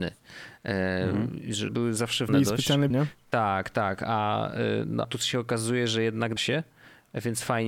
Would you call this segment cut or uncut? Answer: cut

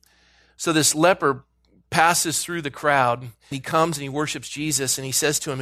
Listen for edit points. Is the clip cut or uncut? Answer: cut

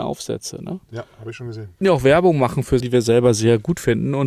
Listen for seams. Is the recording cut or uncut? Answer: cut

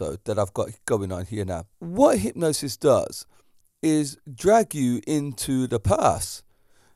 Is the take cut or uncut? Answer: cut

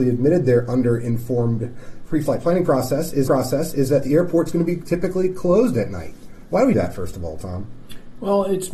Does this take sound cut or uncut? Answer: cut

